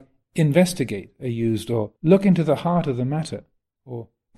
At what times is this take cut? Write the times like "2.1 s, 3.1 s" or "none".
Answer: 2.0 s